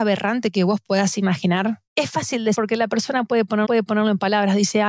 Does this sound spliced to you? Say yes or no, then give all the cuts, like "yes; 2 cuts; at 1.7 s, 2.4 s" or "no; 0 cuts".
yes; 3 cuts; at 1.9 s, 2.5 s, 3.6 s